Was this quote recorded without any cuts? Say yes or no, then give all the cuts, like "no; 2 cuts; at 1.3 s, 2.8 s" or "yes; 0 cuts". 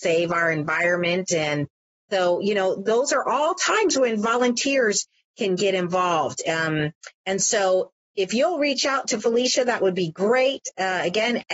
yes; 0 cuts